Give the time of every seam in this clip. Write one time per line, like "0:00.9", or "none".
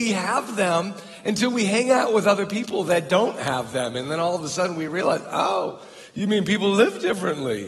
none